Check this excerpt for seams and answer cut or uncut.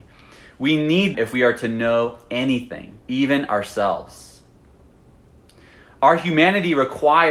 cut